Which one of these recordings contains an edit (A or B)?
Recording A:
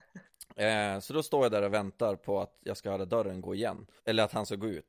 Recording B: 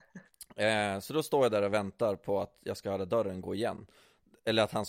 A